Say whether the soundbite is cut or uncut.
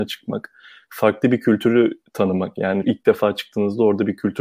cut